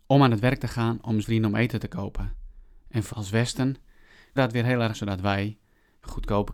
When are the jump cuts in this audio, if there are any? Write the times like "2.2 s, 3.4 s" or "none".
1.2 s, 3.1 s, 4.4 s, 4.9 s